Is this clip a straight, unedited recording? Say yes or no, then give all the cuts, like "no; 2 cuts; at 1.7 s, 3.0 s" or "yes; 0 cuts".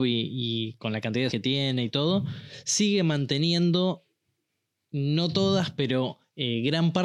no; 1 cut; at 1.3 s